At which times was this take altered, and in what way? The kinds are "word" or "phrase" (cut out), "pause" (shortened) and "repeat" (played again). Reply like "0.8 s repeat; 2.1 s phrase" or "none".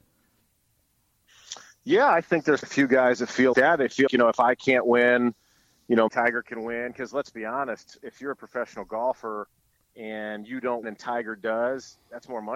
2.6 s word; 3.5 s word; 4.1 s word; 6.1 s word; 10.8 s word